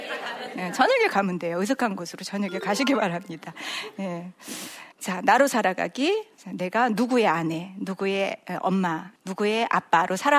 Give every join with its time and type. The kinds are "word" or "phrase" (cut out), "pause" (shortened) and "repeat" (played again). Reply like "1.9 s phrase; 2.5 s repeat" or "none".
4.9 s pause; 6.4 s pause; 9.2 s pause